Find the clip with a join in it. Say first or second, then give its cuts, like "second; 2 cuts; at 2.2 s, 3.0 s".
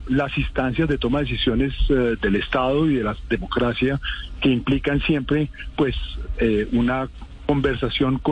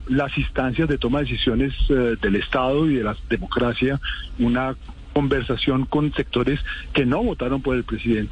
second; 1 cut; at 4.4 s